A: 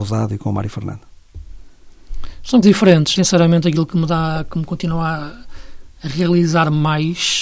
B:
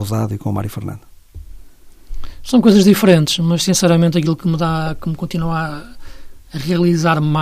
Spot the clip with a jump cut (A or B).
A